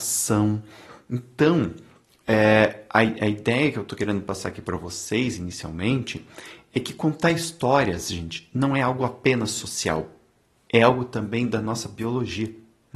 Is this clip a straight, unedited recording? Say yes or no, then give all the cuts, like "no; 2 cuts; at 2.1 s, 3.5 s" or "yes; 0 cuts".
yes; 0 cuts